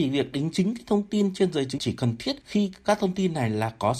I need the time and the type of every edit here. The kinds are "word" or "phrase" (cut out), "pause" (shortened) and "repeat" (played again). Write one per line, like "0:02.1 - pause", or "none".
0:01.8 - word